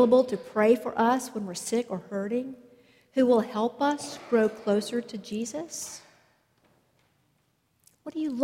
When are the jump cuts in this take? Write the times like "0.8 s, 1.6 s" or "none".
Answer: none